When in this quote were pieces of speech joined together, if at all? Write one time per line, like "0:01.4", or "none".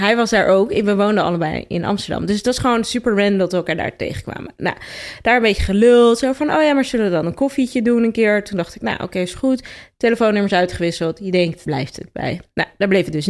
0:11.7